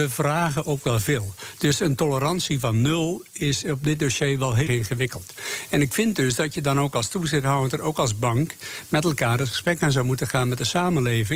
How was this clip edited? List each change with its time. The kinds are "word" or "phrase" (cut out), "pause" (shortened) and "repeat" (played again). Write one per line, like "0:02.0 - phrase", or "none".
0:04.7 - word